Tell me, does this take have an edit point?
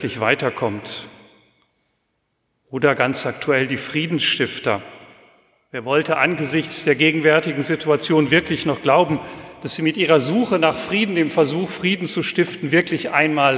no; 0 cuts

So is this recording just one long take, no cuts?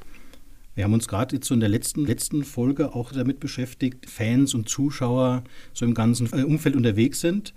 no; 4 cuts; at 2.1 s, 3.1 s, 4.1 s, 6.3 s

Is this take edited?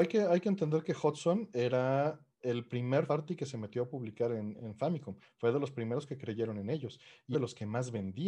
yes; 3 cuts; at 2.3 s, 3.1 s, 7.3 s

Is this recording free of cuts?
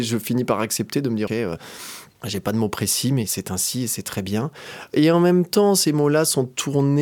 no; 1 cut; at 1.3 s

